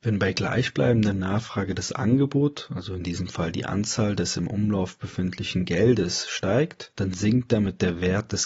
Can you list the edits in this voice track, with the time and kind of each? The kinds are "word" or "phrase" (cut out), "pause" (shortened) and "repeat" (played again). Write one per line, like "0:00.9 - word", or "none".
none